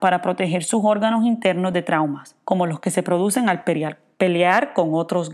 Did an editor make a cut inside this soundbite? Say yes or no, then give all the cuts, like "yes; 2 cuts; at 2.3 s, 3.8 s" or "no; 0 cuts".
no; 0 cuts